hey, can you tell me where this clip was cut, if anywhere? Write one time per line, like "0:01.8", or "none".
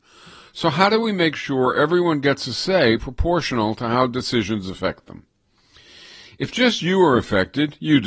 none

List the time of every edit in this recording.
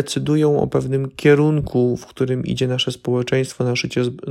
none

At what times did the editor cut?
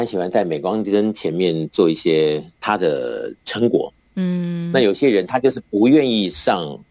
0:02.5

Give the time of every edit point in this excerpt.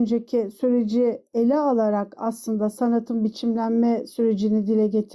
none

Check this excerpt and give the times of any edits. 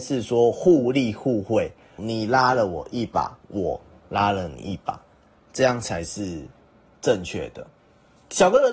0:02.0
0:03.4

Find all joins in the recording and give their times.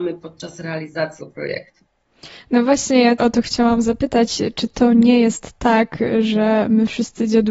0:01.2
0:03.2

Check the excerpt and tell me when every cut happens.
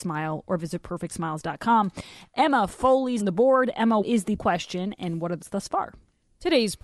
0:03.2
0:04.0
0:04.4
0:05.4

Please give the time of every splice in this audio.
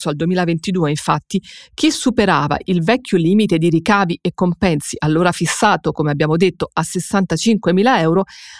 none

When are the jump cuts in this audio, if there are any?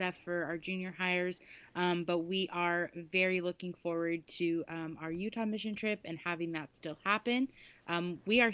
none

